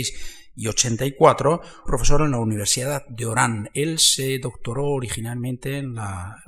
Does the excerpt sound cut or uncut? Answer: cut